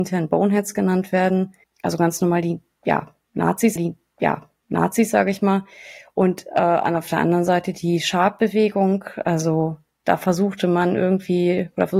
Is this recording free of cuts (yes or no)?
no